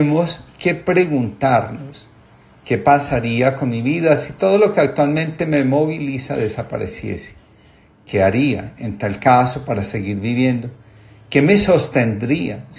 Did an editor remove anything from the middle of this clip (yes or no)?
no